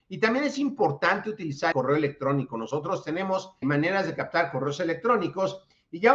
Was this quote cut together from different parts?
yes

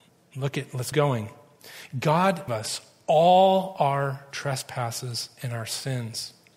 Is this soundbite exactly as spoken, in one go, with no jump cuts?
no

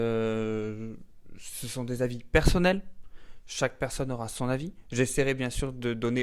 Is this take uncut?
yes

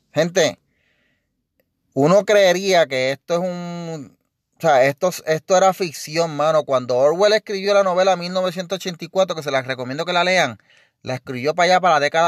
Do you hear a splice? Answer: no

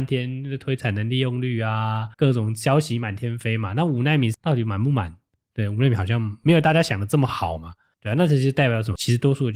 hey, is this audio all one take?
no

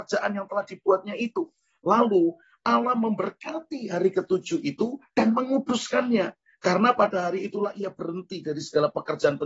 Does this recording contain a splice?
no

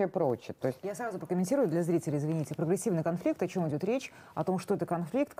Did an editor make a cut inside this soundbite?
no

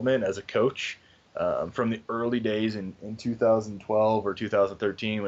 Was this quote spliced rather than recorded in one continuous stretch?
no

